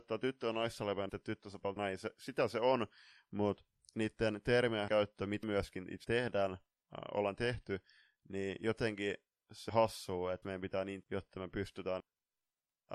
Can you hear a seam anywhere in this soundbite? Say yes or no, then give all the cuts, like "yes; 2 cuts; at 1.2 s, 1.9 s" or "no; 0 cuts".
yes; 9 cuts; at 1.1 s, 1.8 s, 4.9 s, 5.4 s, 6.0 s, 9.7 s, 10.4 s, 11.0 s, 12.0 s